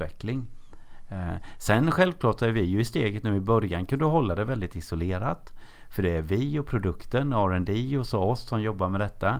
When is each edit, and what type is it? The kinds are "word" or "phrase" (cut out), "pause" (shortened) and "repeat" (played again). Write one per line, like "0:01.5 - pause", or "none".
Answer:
none